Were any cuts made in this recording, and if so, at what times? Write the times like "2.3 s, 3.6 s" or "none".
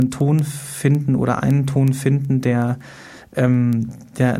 none